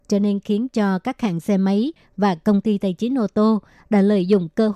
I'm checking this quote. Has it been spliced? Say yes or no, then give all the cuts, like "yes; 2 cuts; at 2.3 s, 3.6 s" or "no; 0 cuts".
no; 0 cuts